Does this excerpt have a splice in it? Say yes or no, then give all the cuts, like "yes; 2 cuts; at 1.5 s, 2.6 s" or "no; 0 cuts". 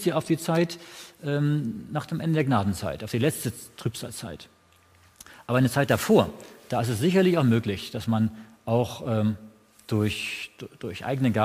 no; 0 cuts